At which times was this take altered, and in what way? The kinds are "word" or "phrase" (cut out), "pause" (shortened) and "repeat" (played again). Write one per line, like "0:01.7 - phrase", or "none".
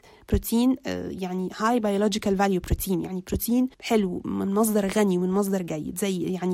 0:03.7 - pause